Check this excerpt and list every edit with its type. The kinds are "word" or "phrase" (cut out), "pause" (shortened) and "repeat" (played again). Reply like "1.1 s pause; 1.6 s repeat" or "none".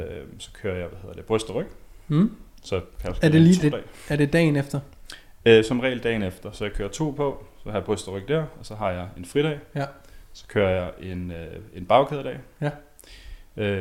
3.6 s word